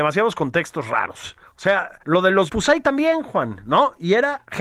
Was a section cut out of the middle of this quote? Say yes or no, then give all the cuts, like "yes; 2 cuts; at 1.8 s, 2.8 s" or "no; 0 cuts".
yes; 4 cuts; at 1.4 s, 2.0 s, 2.5 s, 2.8 s